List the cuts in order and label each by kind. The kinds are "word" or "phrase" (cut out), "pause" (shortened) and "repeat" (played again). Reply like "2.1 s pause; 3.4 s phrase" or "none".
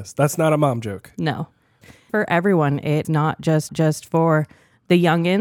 2.1 s phrase; 3.0 s word; 3.7 s repeat